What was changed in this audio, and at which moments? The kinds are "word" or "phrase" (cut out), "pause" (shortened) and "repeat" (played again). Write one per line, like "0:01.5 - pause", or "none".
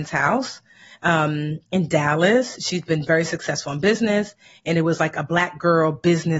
none